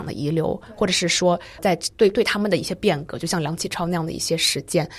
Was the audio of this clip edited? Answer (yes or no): yes